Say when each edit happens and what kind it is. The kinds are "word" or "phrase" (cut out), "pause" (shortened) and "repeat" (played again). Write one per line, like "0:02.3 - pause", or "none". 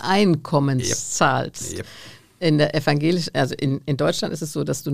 none